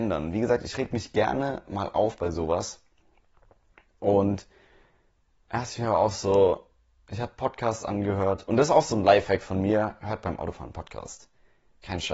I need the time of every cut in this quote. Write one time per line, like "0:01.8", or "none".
none